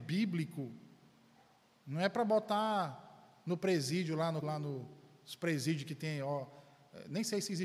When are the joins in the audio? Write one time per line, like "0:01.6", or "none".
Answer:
0:04.4